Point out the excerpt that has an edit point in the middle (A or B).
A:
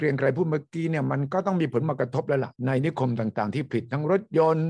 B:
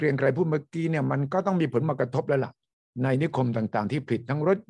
A